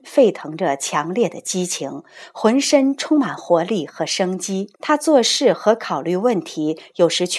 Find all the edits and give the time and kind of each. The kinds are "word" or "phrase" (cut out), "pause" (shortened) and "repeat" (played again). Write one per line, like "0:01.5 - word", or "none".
0:04.8 - pause